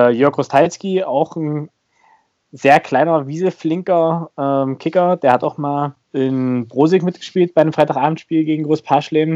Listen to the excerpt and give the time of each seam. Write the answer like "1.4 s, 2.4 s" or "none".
6.0 s